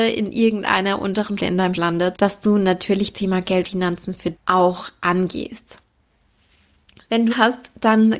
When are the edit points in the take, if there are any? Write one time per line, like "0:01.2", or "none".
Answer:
0:01.4
0:01.7
0:02.1
0:03.1
0:03.6
0:04.3
0:07.3